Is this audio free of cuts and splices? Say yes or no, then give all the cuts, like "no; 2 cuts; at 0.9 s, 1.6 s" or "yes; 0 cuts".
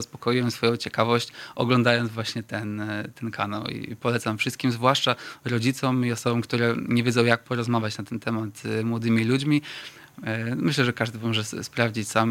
yes; 0 cuts